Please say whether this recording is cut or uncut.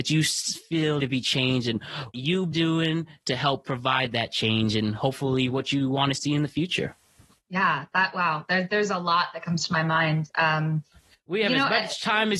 cut